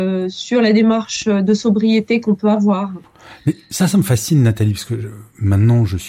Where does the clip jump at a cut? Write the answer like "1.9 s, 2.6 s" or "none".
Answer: none